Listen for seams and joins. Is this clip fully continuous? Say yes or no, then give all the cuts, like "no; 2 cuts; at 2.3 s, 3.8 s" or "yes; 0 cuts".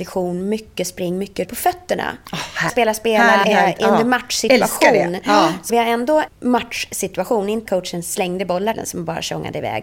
no; 7 cuts; at 1.4 s, 2.7 s, 3.4 s, 5.7 s, 6.3 s, 7.7 s, 8.7 s